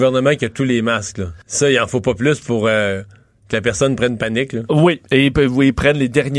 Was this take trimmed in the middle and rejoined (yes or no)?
yes